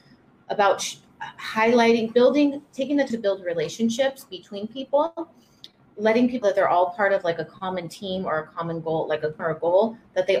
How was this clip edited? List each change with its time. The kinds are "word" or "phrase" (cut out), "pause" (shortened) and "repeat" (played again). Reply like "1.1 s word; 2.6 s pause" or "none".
3.1 s word; 6.4 s word; 9.4 s word